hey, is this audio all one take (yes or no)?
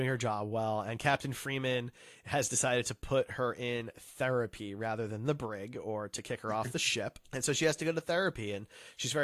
no